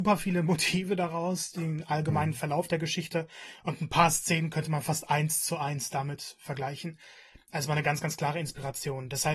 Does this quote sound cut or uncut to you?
uncut